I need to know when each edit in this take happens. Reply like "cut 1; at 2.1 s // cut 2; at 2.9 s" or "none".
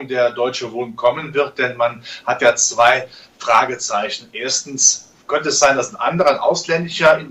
none

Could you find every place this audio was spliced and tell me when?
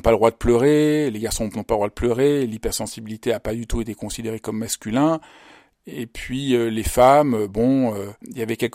none

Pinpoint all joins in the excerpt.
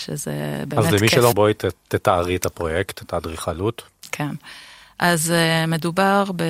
cut 1; at 1.3 s

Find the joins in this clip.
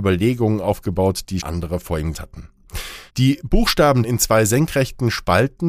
cut 1; at 1.4 s // cut 2; at 2.1 s // cut 3; at 3.1 s // cut 4; at 4.0 s

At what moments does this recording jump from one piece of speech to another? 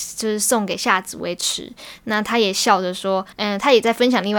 cut 1; at 3.3 s

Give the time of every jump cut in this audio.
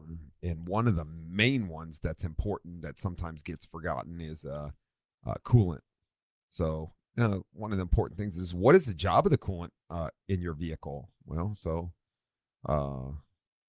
none

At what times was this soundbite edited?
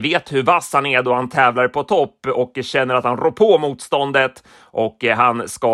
none

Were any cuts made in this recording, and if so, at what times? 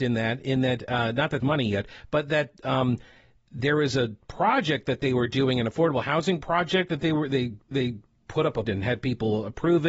cut 1; at 1.4 s // cut 2; at 7.7 s // cut 3; at 8.6 s

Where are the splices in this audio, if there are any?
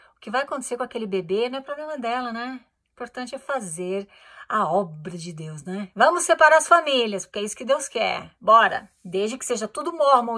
none

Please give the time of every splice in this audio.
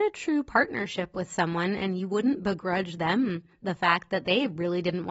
none

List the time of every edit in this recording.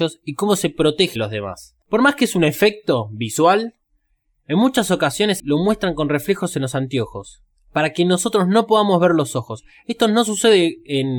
cut 1; at 1.2 s // cut 2; at 1.8 s // cut 3; at 5.4 s // cut 4; at 7.5 s

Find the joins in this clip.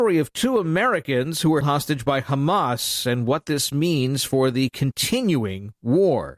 cut 1; at 1.6 s

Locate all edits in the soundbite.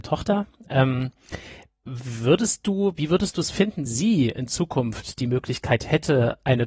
cut 1; at 3.9 s

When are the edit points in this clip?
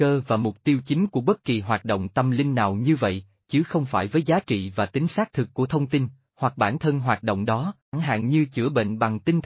cut 1; at 7.9 s

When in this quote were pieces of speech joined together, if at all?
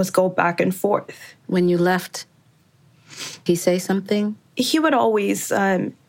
cut 1; at 1.4 s // cut 2; at 3.5 s // cut 3; at 4.5 s

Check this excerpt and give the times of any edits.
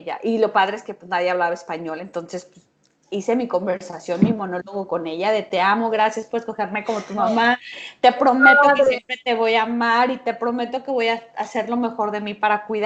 none

